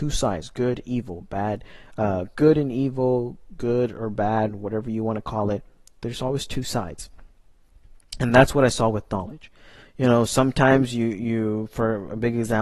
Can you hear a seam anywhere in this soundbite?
no; 0 cuts

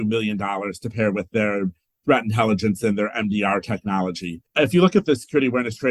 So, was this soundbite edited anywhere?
yes; 1 cut; at 4.5 s

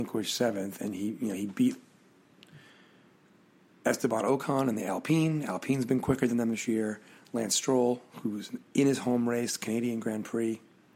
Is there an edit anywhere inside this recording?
no; 0 cuts

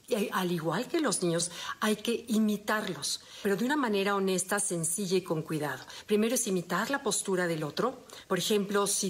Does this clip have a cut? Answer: no; 0 cuts

